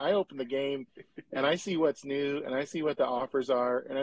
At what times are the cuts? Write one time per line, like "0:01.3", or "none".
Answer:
none